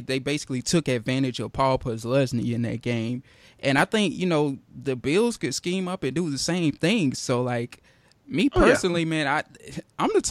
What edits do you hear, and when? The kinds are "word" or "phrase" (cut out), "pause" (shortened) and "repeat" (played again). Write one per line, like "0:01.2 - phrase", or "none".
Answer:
none